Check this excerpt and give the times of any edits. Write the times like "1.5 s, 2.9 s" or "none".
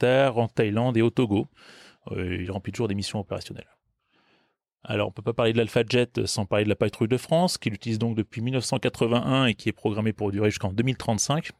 none